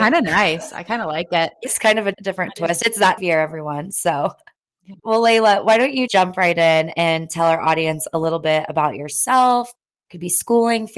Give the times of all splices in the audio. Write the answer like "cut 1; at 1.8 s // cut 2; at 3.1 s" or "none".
cut 1; at 2.1 s // cut 2; at 3.2 s // cut 3; at 5.0 s // cut 4; at 6.1 s